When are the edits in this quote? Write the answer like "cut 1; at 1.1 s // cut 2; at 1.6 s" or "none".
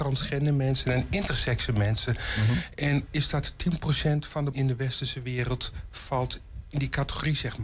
cut 1; at 3.1 s // cut 2; at 4.5 s